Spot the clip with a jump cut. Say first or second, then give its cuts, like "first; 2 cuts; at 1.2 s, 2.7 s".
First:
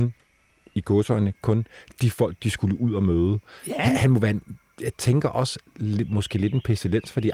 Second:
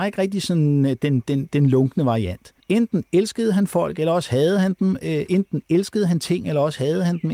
second; 1 cut; at 2.6 s